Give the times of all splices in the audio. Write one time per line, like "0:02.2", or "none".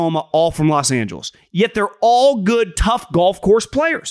none